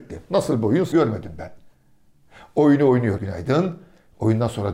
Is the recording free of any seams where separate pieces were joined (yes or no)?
no